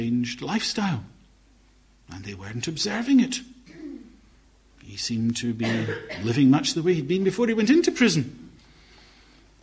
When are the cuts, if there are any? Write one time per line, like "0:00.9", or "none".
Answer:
none